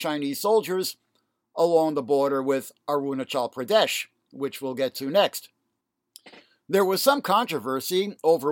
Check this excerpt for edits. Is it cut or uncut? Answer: uncut